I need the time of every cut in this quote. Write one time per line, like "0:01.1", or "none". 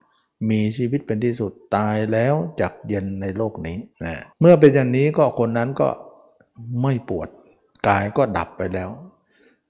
0:03.9
0:04.3